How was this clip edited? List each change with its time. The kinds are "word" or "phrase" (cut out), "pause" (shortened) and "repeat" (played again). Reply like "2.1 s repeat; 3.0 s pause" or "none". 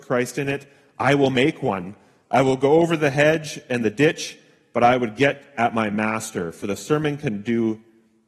none